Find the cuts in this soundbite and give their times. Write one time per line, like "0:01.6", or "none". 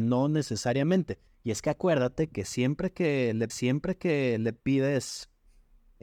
0:01.3
0:03.5